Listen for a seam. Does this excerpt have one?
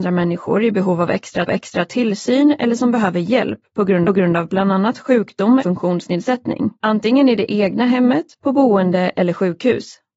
yes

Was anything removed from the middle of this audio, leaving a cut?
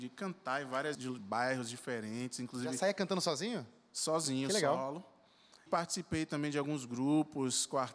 yes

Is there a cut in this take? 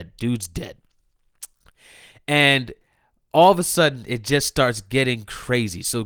no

